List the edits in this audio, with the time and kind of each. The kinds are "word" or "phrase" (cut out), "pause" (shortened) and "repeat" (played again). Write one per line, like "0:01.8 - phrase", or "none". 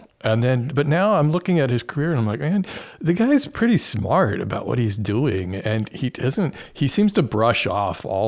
none